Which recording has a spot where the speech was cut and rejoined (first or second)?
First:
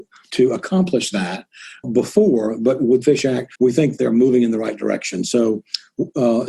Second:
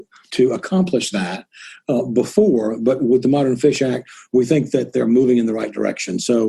first